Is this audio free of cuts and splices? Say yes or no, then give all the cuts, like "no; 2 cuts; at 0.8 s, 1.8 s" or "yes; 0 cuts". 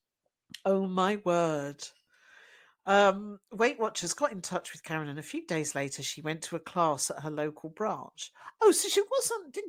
yes; 0 cuts